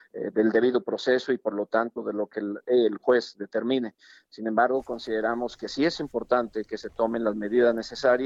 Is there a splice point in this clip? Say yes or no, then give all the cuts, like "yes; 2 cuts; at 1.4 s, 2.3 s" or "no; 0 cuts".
no; 0 cuts